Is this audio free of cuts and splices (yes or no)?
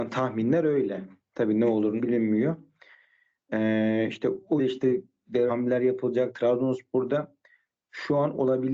no